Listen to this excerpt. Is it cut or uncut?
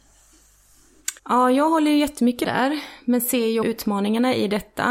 cut